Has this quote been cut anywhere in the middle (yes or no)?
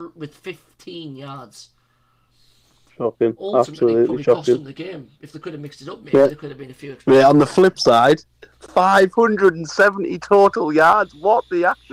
no